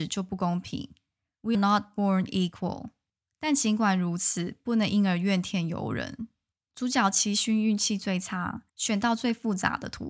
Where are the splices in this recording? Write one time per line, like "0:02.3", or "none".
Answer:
0:01.5
0:08.7

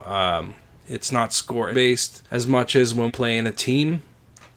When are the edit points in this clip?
0:01.7
0:02.3
0:03.1

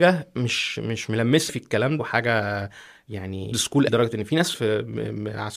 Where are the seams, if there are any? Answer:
0:01.5
0:02.0
0:03.5
0:03.9
0:04.5

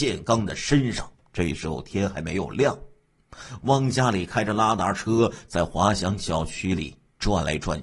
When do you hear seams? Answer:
0:01.1

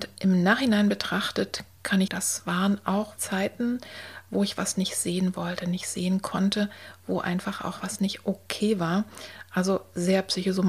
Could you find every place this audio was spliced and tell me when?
0:02.1
0:03.2

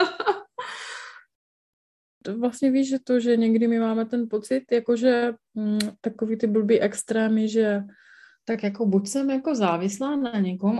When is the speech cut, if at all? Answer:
none

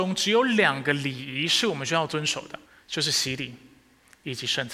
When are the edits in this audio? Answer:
0:02.7

